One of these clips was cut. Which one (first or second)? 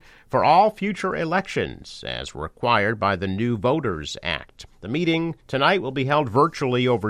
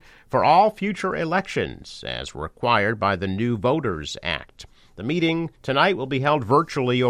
first